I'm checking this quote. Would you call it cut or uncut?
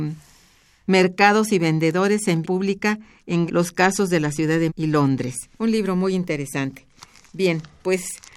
cut